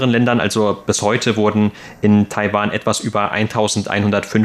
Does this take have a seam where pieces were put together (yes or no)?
no